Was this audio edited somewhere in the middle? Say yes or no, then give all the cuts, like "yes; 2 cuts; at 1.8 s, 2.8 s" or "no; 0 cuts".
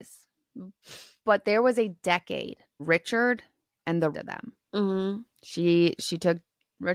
yes; 4 cuts; at 1.2 s, 2.8 s, 4.1 s, 5.3 s